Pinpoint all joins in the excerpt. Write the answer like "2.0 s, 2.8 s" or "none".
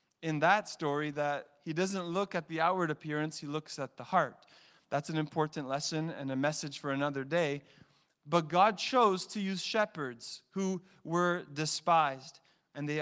none